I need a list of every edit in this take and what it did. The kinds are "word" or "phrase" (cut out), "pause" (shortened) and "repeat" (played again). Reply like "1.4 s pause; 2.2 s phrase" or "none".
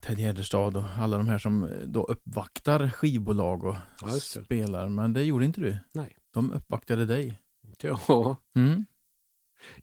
6.2 s pause